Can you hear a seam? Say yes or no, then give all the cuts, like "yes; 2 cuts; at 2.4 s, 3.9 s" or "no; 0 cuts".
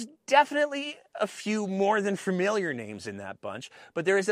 no; 0 cuts